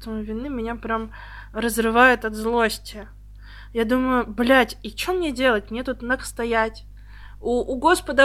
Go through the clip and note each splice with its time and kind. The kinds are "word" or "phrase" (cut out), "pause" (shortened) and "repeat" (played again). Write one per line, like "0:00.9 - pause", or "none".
0:06.2 - word

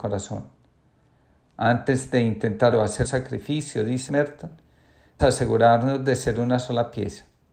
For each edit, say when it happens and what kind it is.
0:02.7 - word
0:03.0 - word
0:04.1 - word
0:05.2 - word

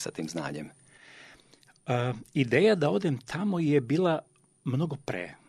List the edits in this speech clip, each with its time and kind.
none

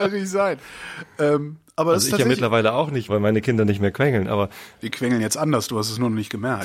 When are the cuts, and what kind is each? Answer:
0:03.1 - word
0:04.8 - word

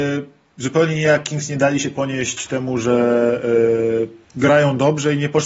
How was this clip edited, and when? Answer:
0:04.2 - pause

